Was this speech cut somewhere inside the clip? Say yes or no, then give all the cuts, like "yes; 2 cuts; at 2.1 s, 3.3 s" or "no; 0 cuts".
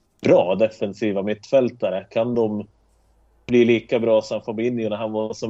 no; 0 cuts